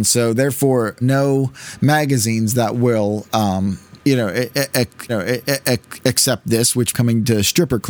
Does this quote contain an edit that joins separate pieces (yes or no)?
yes